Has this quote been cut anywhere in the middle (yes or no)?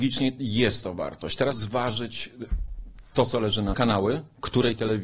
yes